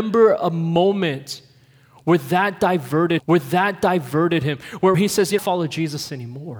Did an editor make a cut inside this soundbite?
yes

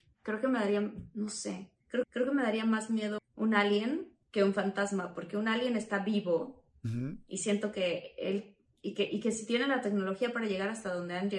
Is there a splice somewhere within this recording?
yes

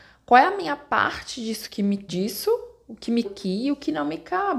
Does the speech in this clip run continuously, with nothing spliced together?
no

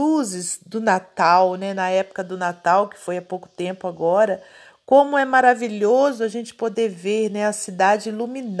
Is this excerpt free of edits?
yes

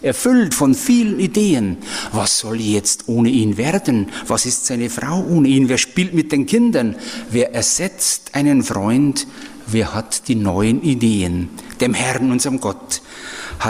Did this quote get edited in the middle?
no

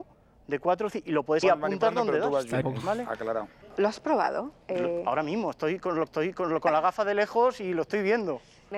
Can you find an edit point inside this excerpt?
yes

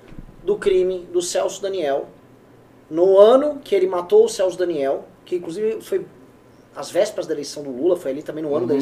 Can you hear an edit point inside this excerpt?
no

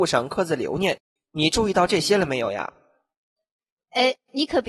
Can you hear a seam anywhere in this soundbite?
yes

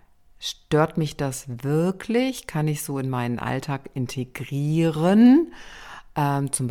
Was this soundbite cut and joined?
no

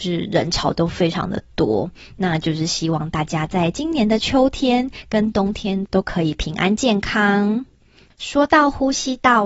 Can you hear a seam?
no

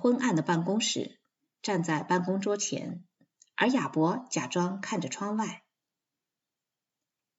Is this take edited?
no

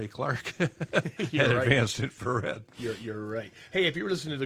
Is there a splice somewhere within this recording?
no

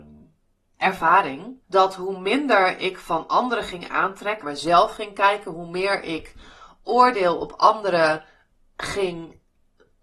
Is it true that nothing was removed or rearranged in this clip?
no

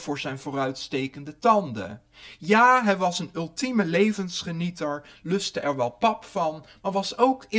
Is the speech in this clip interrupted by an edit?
no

